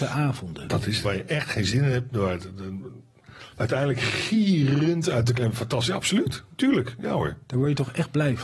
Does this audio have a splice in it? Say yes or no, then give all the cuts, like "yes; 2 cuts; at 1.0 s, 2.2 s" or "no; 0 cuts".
yes; 3 cuts; at 1.0 s, 3.5 s, 5.4 s